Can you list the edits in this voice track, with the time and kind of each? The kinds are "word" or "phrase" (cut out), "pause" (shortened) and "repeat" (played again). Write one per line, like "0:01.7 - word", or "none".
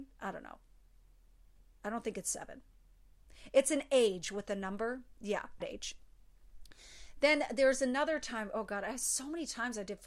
0:05.6 - word